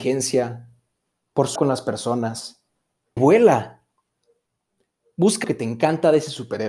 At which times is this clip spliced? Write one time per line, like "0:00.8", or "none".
0:01.6
0:03.2
0:05.4